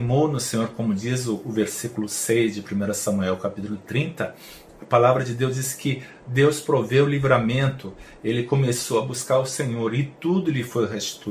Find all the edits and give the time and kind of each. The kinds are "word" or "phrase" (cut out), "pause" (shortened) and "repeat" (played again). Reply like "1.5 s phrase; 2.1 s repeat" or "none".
none